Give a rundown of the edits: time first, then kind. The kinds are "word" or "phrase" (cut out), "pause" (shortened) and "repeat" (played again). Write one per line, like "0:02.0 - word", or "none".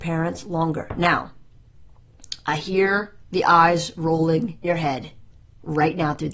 0:04.6 - word